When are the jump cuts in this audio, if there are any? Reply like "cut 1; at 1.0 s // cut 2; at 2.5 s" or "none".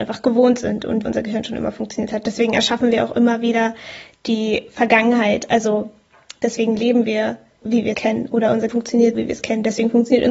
cut 1; at 1.1 s // cut 2; at 7.6 s // cut 3; at 7.9 s // cut 4; at 8.7 s // cut 5; at 9.1 s